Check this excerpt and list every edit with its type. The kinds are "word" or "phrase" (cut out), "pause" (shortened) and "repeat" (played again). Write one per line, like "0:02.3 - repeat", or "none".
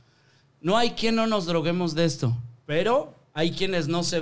0:02.6 - pause